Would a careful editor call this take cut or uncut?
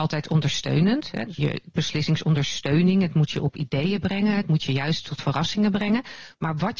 cut